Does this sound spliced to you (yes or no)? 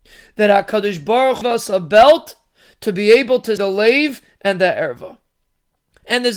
yes